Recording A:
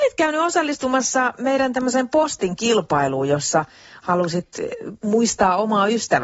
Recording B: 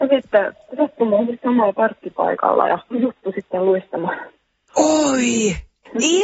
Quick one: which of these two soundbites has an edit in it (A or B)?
B